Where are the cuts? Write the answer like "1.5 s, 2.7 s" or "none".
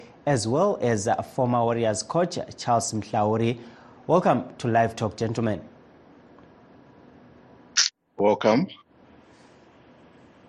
none